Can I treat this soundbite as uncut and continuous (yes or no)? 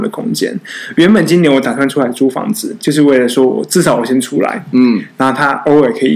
yes